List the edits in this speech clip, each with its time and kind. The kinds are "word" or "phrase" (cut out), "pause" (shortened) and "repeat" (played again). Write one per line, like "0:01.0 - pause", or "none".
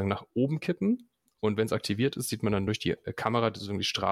none

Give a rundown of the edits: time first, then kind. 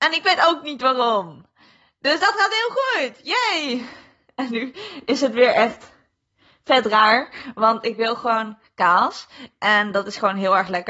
none

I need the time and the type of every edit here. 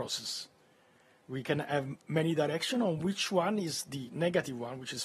none

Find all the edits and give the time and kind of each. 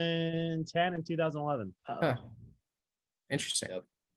0:01.8 - pause

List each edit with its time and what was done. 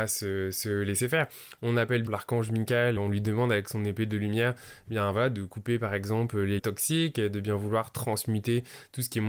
0:02.1 - phrase
0:03.0 - word
0:06.6 - word

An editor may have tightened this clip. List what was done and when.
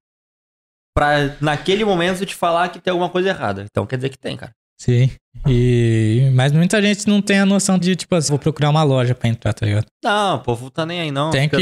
0:07.8 - word
0:08.3 - word
0:09.9 - pause

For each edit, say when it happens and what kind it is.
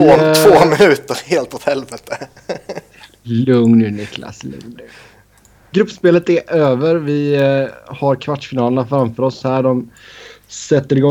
none

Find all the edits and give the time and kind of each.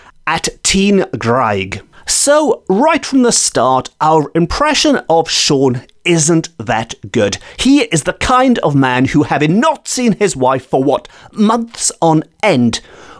none

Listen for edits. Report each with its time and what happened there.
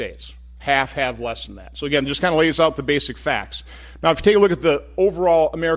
none

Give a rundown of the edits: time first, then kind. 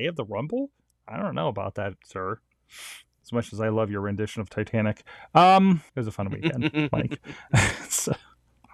0:02.0 - pause
0:05.9 - pause

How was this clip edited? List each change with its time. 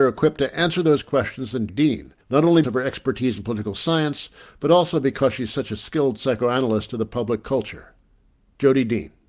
0:01.7 - word
0:02.2 - pause
0:02.6 - word

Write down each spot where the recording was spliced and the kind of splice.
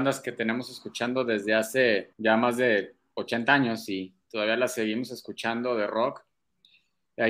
0:02.1 - pause

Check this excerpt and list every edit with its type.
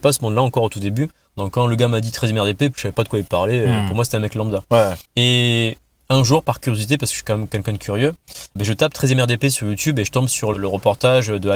0:02.7 - phrase
0:05.0 - pause
0:08.6 - word
0:10.5 - word

